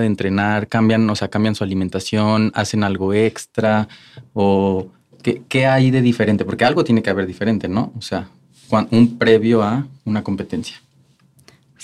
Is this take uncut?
yes; 0 cuts

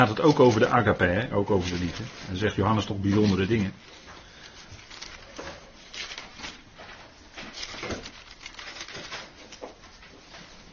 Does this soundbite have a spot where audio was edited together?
no; 0 cuts

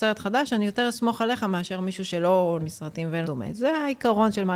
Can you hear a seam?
yes; 2 cuts; at 2.6 s, 3.2 s

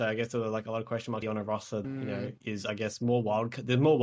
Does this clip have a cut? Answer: yes; 3 cuts; at 1.2 s, 1.8 s, 2.4 s

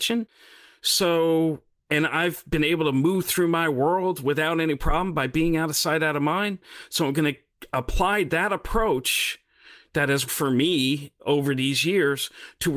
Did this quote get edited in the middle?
yes; 1 cut; at 10.3 s

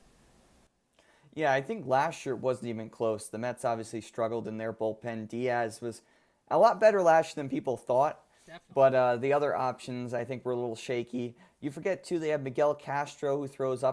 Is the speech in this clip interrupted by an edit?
no; 0 cuts

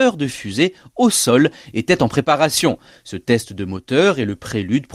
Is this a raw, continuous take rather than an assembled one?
yes; 0 cuts

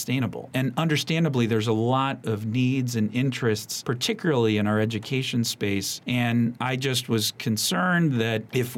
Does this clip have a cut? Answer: no; 0 cuts

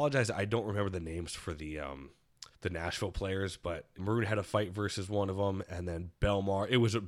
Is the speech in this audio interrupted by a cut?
yes; 2 cuts; at 2.5 s, 4.0 s

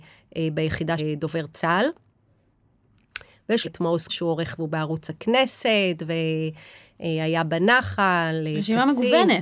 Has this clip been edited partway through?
yes; 4 cuts; at 1.0 s, 3.6 s, 4.1 s, 4.6 s

